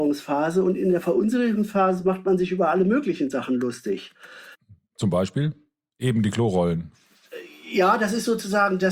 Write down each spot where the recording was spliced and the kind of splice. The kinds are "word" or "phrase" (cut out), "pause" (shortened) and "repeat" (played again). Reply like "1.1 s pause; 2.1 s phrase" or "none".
none